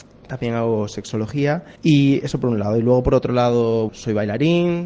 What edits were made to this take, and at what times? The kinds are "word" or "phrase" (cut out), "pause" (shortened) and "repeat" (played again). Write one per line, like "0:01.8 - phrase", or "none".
0:01.8 - pause
0:03.9 - word